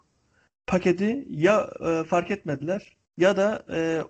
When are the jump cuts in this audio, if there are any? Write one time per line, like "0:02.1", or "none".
0:03.1